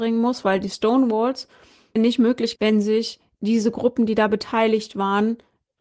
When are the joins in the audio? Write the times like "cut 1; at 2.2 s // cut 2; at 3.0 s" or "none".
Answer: cut 1; at 2.0 s // cut 2; at 2.6 s